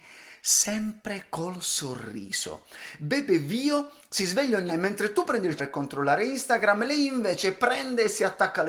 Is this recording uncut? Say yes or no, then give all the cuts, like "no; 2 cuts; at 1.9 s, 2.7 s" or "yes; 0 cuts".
no; 2 cuts; at 4.7 s, 5.6 s